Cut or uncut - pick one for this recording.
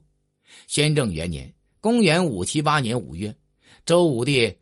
uncut